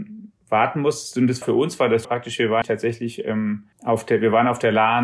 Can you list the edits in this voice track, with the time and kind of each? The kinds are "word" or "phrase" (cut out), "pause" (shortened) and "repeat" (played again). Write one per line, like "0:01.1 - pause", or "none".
0:01.4 - word
0:02.0 - word
0:02.6 - word
0:03.7 - pause